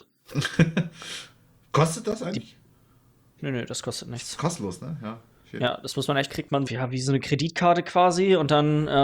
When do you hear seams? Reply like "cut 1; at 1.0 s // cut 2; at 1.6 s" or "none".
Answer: cut 1; at 3.4 s // cut 2; at 6.3 s // cut 3; at 6.7 s